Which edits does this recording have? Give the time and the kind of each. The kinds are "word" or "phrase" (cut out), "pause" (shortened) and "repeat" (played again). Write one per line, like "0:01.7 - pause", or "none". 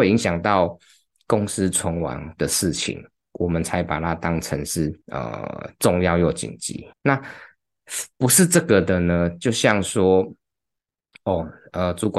0:05.0 - pause
0:06.9 - pause